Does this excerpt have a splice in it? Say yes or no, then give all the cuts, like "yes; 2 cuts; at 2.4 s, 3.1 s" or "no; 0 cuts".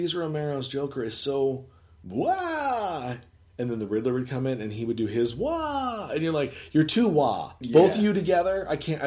no; 0 cuts